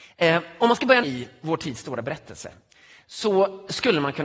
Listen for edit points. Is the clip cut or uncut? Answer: cut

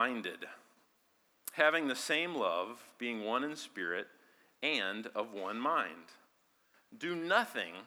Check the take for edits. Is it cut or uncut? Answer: uncut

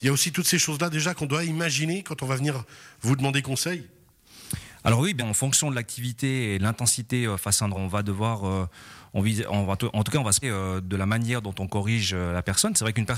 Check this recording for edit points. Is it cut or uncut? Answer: cut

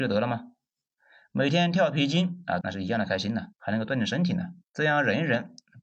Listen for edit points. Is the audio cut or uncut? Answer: cut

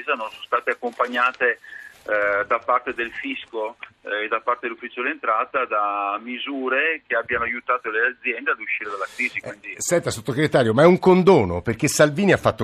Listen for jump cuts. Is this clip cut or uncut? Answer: uncut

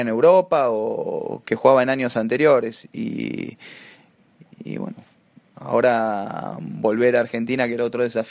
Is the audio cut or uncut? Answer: uncut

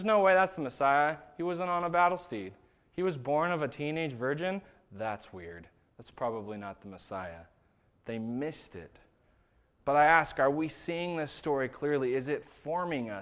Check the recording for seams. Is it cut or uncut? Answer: uncut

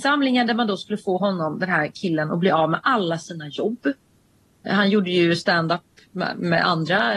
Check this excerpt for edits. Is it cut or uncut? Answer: uncut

